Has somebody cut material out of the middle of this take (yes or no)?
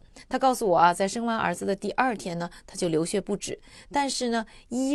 no